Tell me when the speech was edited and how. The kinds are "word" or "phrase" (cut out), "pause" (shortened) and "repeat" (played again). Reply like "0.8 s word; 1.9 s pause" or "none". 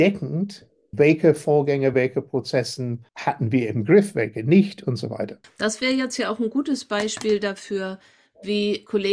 none